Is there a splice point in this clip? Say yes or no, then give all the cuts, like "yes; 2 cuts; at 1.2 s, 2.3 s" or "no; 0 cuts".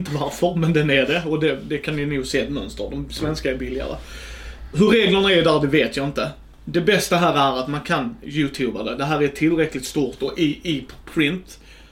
no; 0 cuts